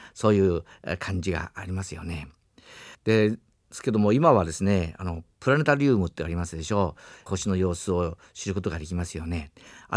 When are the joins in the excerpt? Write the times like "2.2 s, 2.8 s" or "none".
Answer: 2.9 s, 5.3 s, 7.3 s

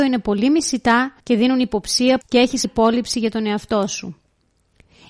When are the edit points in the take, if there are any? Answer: 1.2 s, 2.2 s, 2.6 s

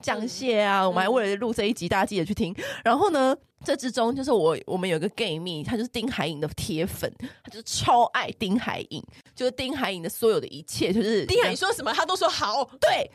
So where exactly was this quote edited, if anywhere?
none

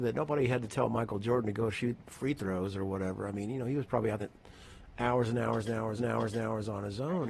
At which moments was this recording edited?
4.2 s, 6.0 s

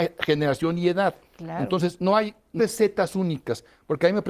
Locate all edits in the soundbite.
1.3 s, 2.0 s, 2.6 s

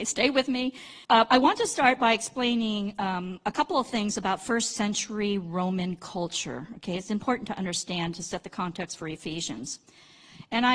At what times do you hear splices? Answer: 1.0 s

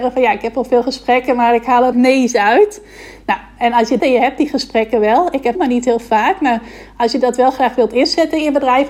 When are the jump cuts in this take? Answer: 1.9 s, 4.0 s, 5.5 s

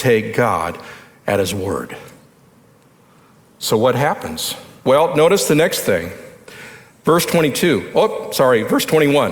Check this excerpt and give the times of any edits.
none

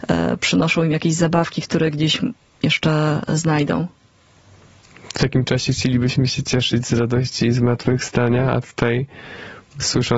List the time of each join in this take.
none

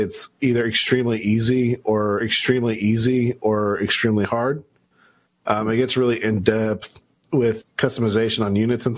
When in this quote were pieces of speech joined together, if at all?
2.2 s, 7.6 s

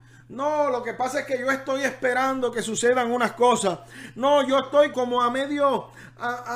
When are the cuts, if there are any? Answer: 4.9 s

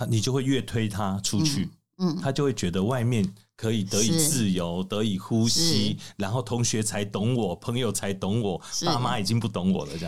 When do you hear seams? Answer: none

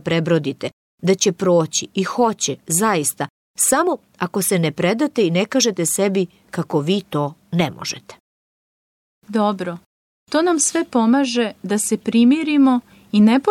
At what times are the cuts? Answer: none

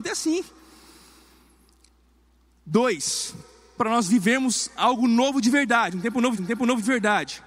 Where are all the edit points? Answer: 3.8 s, 6.4 s

